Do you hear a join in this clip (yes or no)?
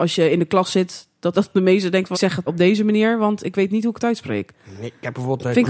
yes